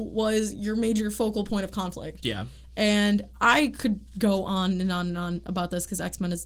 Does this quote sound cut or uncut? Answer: uncut